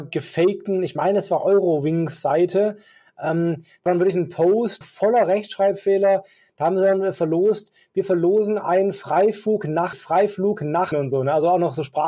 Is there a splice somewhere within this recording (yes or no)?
yes